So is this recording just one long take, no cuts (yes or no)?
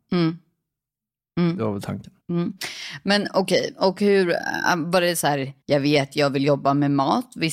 no